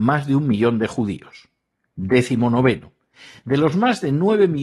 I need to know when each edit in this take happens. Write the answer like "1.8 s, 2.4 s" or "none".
none